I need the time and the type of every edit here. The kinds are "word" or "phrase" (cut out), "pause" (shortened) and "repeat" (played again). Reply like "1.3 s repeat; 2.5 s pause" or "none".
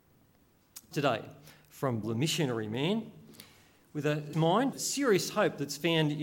0.9 s word; 2.0 s word; 4.3 s word; 4.7 s word